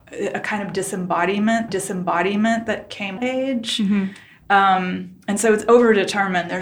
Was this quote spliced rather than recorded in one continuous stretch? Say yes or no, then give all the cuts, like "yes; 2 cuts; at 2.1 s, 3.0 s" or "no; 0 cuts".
yes; 2 cuts; at 1.7 s, 3.2 s